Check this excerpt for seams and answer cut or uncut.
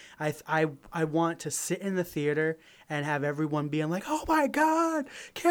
uncut